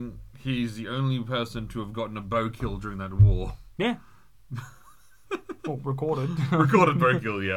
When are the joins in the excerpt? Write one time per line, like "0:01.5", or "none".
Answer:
none